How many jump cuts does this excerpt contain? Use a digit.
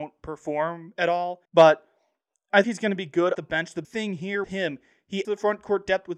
6